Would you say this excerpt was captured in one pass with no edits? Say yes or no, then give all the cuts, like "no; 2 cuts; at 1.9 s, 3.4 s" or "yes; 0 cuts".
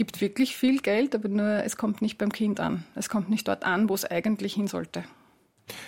yes; 0 cuts